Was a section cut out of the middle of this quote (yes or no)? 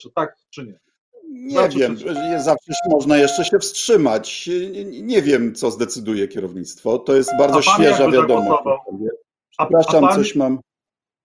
no